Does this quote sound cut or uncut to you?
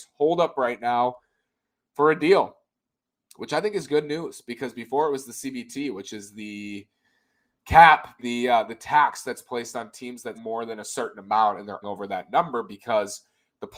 cut